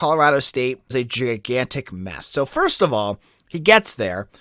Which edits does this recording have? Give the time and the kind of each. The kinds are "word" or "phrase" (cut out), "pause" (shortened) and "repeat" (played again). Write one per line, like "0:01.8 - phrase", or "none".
0:00.9 - word

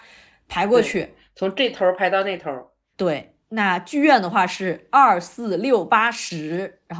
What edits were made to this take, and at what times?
0:03.4 - pause

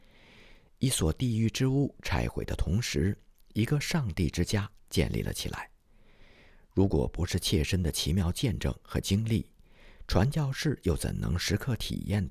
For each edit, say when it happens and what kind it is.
none

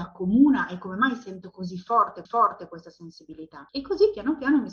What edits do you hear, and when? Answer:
0:02.3 - repeat
0:03.7 - pause

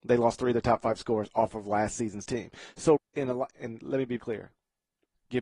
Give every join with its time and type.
0:03.0 - word
0:04.2 - word

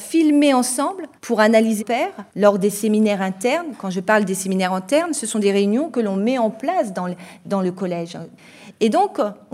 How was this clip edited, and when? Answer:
0:01.2 - pause
0:01.8 - word
0:02.3 - pause

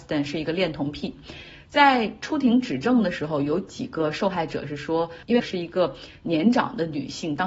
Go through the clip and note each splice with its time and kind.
0:05.4 - word

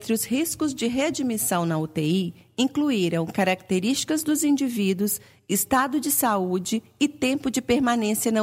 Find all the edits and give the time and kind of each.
none

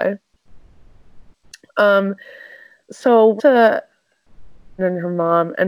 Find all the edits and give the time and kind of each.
0:02.9 - word
0:03.4 - word
0:04.8 - word

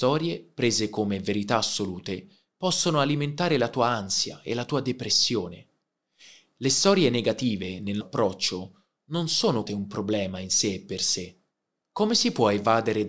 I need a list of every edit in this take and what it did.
0:08.0 - word
0:09.7 - word

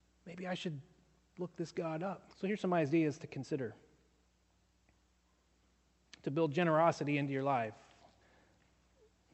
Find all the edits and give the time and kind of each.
0:02.3 - pause

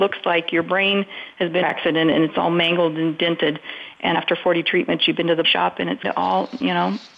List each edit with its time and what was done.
0:01.6 - phrase
0:04.1 - word
0:05.4 - word
0:06.0 - word

